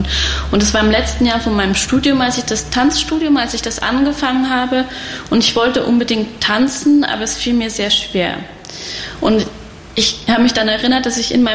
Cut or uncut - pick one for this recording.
uncut